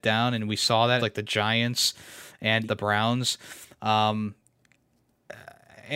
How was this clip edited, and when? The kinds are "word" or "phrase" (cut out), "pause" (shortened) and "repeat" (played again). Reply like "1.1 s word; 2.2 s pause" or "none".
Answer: 1.0 s word; 2.6 s word